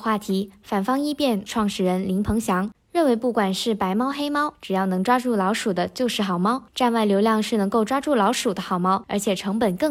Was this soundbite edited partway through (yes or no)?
yes